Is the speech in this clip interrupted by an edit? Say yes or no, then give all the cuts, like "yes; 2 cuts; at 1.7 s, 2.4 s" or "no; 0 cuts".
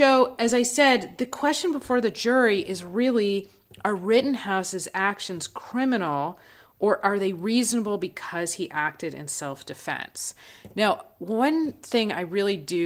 no; 0 cuts